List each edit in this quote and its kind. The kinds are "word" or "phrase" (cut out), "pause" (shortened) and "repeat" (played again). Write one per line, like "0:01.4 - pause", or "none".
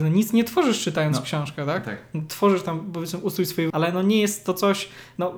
0:03.7 - word